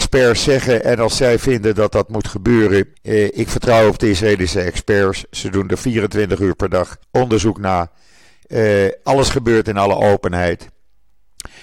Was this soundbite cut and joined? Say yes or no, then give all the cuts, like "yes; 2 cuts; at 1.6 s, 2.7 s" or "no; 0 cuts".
yes; 2 cuts; at 2.9 s, 7.0 s